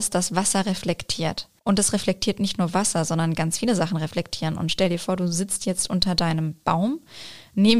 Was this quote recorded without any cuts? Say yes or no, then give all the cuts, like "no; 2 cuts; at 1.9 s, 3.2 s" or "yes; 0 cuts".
no; 1 cut; at 1.6 s